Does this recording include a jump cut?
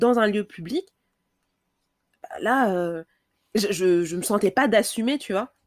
no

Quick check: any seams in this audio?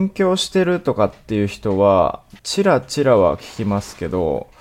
yes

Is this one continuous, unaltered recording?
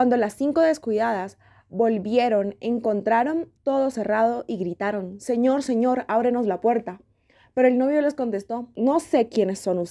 no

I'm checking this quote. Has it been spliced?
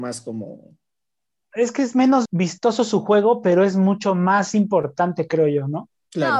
yes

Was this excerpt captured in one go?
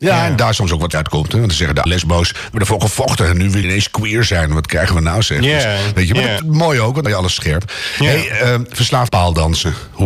no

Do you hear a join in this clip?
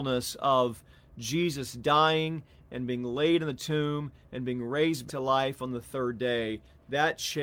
yes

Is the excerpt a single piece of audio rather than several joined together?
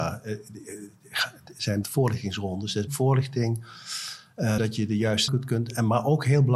no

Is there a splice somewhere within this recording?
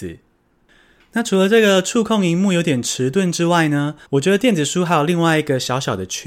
yes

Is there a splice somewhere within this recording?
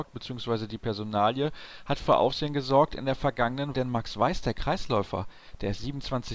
yes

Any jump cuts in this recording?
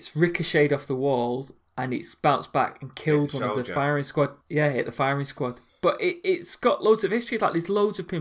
yes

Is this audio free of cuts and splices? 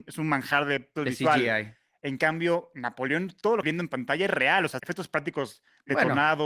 no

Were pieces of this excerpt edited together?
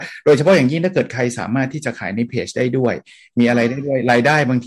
no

